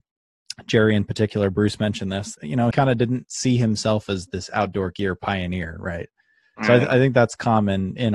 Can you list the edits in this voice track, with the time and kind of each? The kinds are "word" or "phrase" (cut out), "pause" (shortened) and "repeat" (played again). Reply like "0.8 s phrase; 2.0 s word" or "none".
2.3 s word; 2.7 s word; 3.2 s word; 6.5 s word